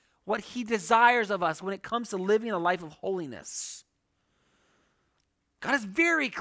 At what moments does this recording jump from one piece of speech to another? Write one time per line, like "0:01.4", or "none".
none